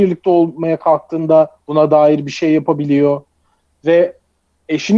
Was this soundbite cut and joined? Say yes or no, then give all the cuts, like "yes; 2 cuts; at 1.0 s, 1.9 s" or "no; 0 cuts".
yes; 1 cut; at 1.6 s